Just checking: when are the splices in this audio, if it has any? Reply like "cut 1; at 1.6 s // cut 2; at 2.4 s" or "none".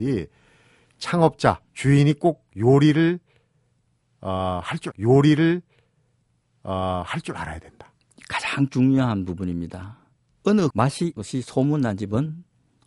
cut 1; at 1.7 s // cut 2; at 4.9 s // cut 3; at 8.2 s // cut 4; at 10.7 s // cut 5; at 11.2 s